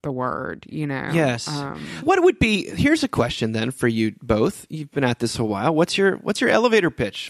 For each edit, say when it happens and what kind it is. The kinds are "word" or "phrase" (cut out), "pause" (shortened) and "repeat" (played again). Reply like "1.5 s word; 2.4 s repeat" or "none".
2.0 s word